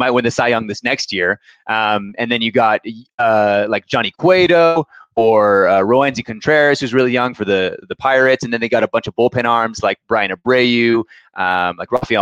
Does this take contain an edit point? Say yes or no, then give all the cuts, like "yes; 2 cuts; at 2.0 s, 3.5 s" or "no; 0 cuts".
no; 0 cuts